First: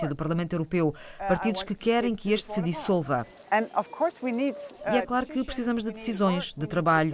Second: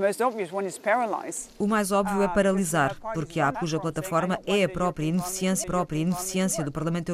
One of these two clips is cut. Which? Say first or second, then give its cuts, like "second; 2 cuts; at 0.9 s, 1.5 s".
second; 3 cuts; at 1.5 s, 3.5 s, 5.6 s